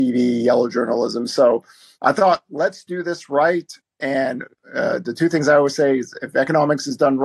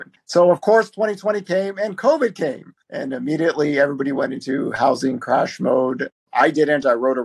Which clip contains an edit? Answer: second; 1 cut; at 2.8 s

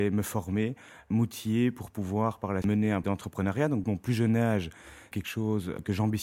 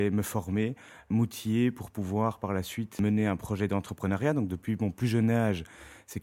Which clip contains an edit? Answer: first; 4 cuts; at 2.6 s, 3.0 s, 3.8 s, 5.1 s

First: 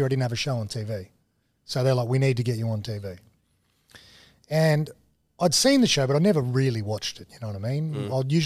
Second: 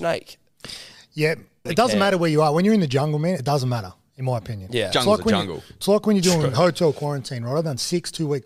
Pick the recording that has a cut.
second; 1 cut; at 1.7 s

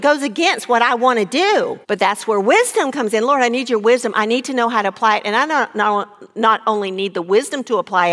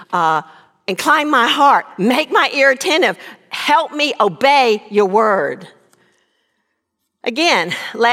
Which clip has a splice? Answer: first; 1 cut; at 1.8 s

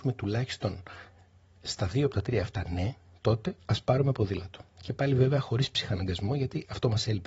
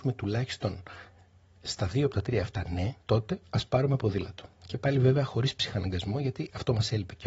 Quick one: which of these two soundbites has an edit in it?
second; 1 cut; at 3.0 s

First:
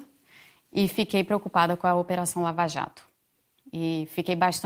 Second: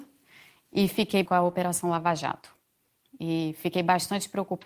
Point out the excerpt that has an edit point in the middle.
second; 1 cut; at 1.3 s

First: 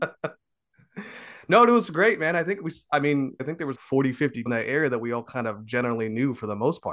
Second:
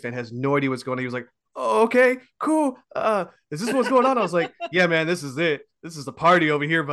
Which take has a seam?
first; 3 cuts; at 3.4 s, 3.7 s, 4.5 s

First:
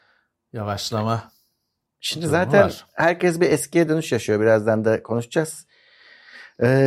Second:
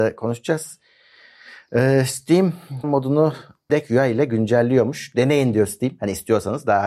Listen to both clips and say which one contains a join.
second; 2 cuts; at 2.8 s, 3.7 s

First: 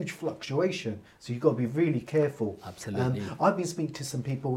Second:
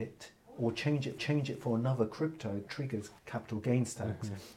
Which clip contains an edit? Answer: second; 3 cuts; at 1.2 s, 2.7 s, 3.2 s

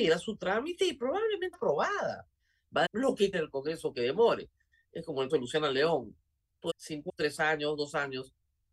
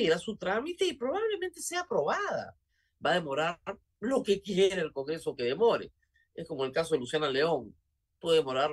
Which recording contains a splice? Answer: first; 6 cuts; at 1.5 s, 2.8 s, 3.3 s, 5.3 s, 6.7 s, 7.1 s

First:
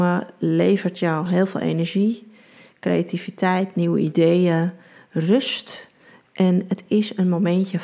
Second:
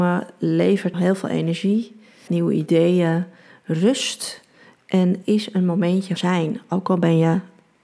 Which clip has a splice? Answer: second; 4 cuts; at 0.9 s, 2.3 s, 5.2 s, 6.2 s

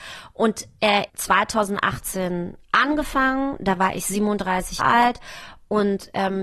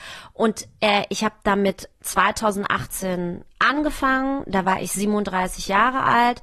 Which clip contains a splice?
first; 2 cuts; at 1.1 s, 4.8 s

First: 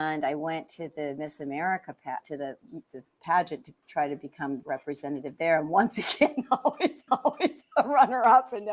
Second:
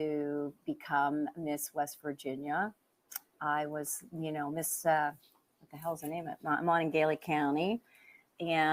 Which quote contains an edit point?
first; 4 cuts; at 2.2 s, 2.8 s, 4.6 s, 7.1 s

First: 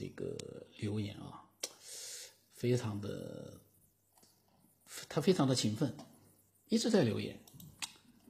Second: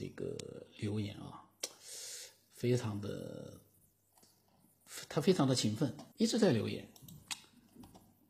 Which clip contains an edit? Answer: second; 1 cut; at 6.1 s

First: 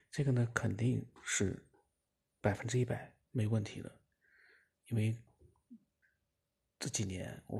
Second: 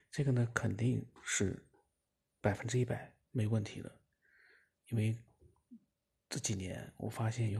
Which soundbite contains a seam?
second; 1 cut; at 5.9 s

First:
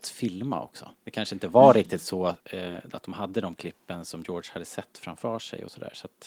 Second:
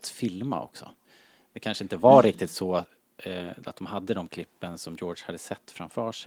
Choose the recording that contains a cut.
first; 2 cuts; at 1.0 s, 2.4 s

